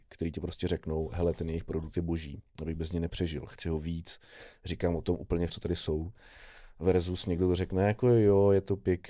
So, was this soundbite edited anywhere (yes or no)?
yes